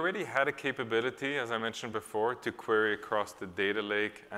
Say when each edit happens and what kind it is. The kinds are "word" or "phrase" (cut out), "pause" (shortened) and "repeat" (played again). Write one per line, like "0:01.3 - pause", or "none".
none